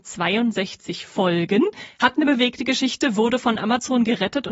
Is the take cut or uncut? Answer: uncut